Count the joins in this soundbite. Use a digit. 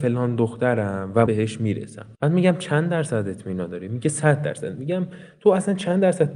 2